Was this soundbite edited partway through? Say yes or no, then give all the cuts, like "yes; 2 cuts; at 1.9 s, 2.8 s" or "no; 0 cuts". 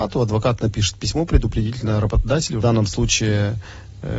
yes; 1 cut; at 2.6 s